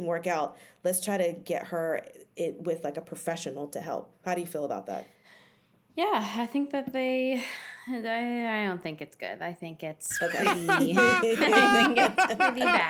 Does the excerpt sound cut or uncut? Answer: uncut